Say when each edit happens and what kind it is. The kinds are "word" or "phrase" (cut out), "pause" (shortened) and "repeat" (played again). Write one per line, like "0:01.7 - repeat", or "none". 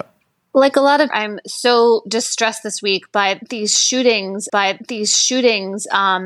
0:01.1 - phrase
0:04.5 - repeat